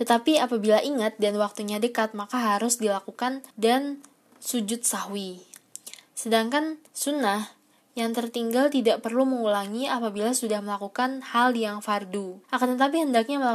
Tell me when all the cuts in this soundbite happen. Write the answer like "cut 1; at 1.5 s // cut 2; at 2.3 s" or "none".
cut 1; at 3.5 s // cut 2; at 6.9 s // cut 3; at 12.4 s